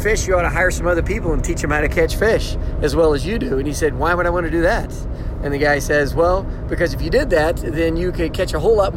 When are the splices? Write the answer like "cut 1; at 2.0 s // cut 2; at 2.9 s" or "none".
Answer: none